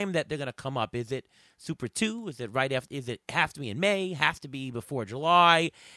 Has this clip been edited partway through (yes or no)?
no